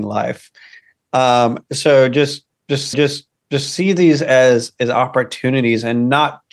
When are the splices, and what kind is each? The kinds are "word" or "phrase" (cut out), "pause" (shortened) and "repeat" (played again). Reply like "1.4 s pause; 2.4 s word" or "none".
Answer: 2.9 s repeat